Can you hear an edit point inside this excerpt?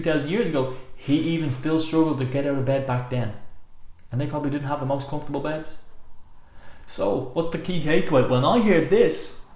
no; 0 cuts

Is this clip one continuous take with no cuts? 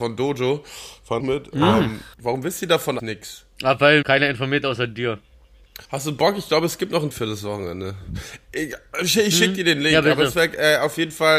no; 6 cuts; at 1.2 s, 2.1 s, 3.0 s, 4.0 s, 5.8 s, 7.1 s

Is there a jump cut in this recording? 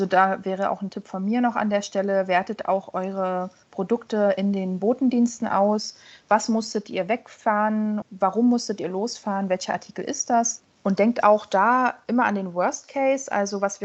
no; 0 cuts

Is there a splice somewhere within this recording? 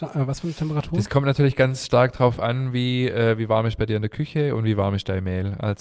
no; 0 cuts

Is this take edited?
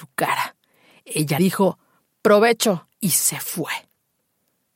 yes; 2 cuts; at 1.4 s, 2.9 s

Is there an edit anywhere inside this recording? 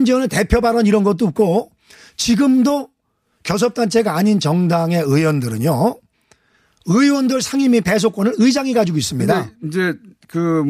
no; 0 cuts

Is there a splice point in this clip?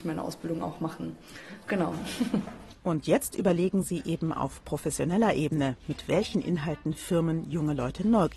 no; 0 cuts

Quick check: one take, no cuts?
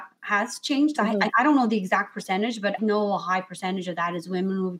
no; 3 cuts; at 1.0 s, 1.3 s, 2.8 s

